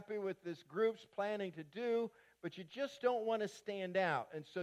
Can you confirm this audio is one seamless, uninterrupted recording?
yes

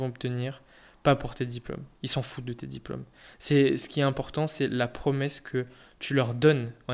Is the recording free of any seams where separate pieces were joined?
yes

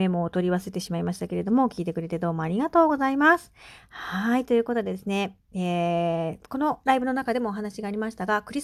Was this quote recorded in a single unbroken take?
yes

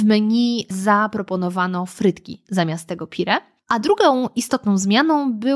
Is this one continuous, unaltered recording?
yes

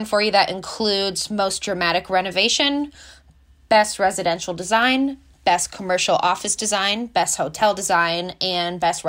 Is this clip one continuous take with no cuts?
yes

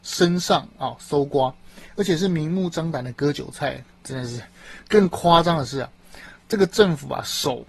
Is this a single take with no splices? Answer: no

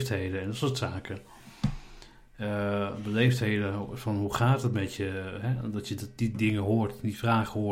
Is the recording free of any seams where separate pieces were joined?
yes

